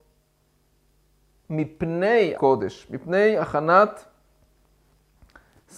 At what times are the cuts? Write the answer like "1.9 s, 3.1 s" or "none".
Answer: 2.3 s